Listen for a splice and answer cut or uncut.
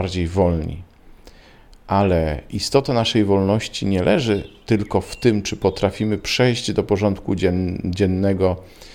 uncut